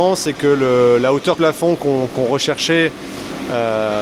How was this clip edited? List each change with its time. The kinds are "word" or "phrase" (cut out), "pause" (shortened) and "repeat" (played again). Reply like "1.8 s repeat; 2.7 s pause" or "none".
1.3 s word